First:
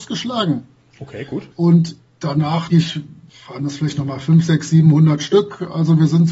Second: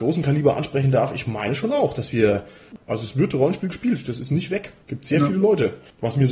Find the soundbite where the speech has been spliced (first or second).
first